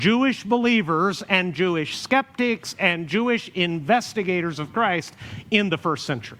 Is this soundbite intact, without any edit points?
yes; 0 cuts

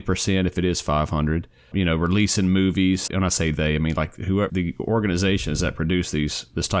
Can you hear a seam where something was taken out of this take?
yes; 3 cuts; at 1.7 s, 3.1 s, 4.5 s

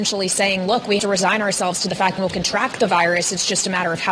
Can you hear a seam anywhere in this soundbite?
yes; 2 cuts; at 1.0 s, 2.2 s

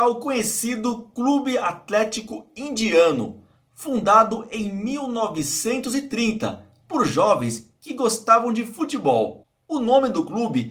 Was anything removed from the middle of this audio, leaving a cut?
no; 0 cuts

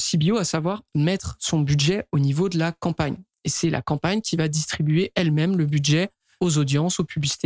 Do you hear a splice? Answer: no; 0 cuts

